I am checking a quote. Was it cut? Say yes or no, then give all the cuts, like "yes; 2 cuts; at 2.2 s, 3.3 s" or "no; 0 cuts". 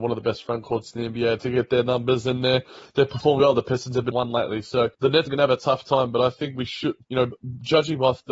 yes; 6 cuts; at 1.4 s, 3.4 s, 4.1 s, 4.9 s, 5.3 s, 7.0 s